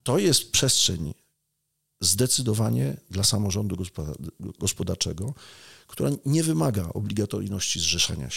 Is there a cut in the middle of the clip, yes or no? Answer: no